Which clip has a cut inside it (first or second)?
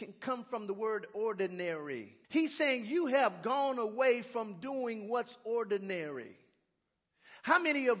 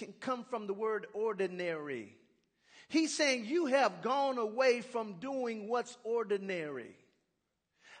first